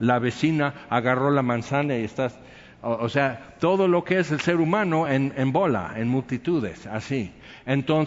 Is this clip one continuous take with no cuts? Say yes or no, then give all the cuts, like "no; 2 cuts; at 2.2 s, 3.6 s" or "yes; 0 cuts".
yes; 0 cuts